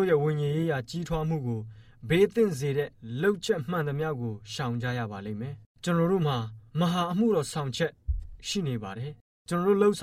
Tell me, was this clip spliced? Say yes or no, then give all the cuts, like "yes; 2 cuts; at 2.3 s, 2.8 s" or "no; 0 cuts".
yes; 2 cuts; at 5.7 s, 6.7 s